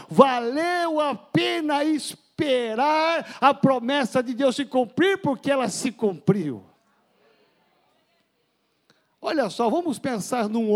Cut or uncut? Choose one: uncut